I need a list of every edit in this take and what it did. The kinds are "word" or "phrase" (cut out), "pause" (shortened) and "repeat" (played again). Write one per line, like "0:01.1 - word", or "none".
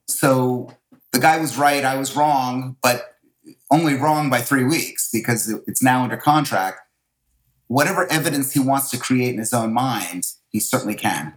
none